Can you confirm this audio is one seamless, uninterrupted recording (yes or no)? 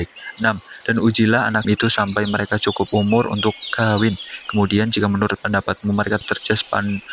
no